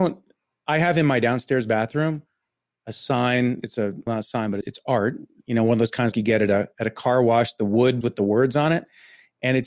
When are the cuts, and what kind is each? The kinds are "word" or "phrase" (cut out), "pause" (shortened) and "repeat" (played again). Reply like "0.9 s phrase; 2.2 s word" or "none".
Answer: 4.1 s word; 4.6 s word; 6.1 s word; 8.0 s word